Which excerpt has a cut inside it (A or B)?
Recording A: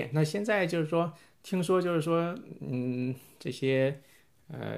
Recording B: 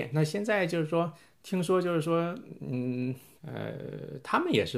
B